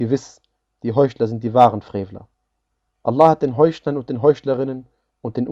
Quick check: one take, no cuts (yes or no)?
yes